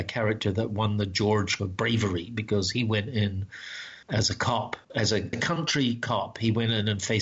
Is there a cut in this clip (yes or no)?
yes